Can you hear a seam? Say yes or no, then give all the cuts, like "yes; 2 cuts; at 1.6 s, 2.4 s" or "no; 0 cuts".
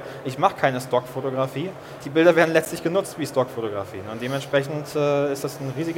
yes; 1 cut; at 2.0 s